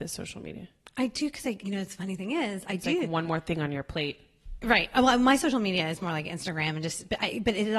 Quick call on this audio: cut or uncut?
cut